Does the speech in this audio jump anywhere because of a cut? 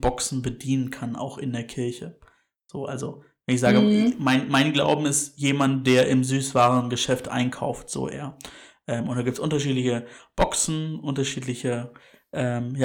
no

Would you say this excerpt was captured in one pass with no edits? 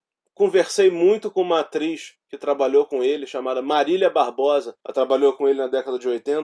no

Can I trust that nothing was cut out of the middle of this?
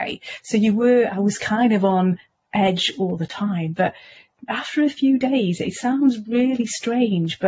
yes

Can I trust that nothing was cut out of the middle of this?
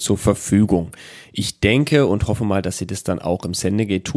yes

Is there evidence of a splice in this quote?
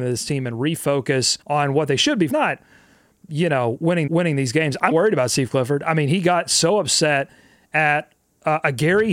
yes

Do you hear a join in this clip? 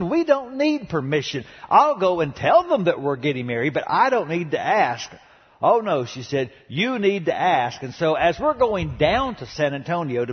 no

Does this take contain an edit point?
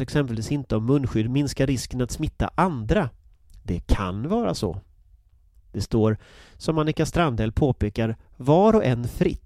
no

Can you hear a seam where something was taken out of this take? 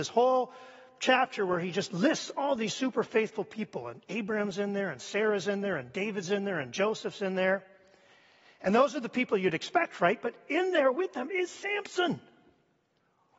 no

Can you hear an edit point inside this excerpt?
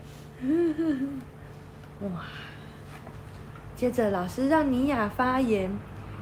no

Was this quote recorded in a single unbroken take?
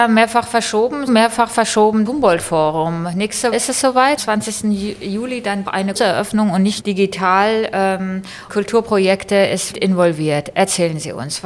no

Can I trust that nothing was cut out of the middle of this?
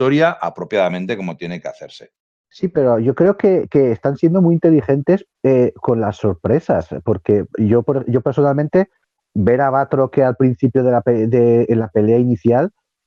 no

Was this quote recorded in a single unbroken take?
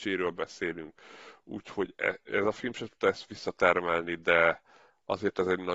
yes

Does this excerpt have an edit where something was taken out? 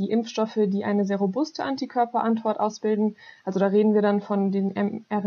no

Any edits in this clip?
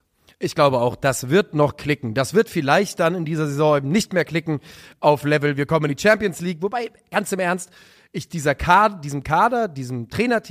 no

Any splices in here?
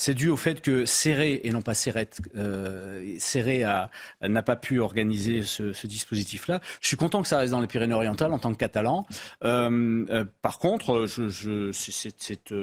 no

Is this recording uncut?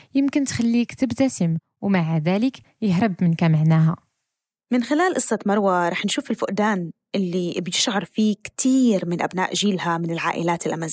yes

